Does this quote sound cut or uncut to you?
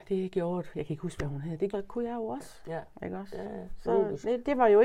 cut